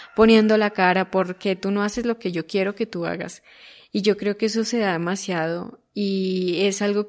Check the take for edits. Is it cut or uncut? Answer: uncut